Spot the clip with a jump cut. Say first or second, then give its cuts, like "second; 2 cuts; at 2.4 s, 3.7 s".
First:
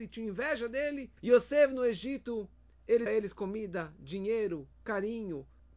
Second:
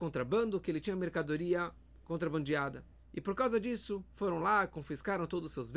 first; 2 cuts; at 1.2 s, 3.1 s